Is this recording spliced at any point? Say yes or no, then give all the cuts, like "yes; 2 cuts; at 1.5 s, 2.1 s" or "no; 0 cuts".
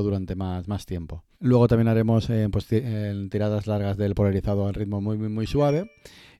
yes; 1 cut; at 1.3 s